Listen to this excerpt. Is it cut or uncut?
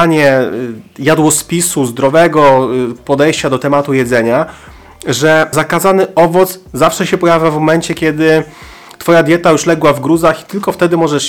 cut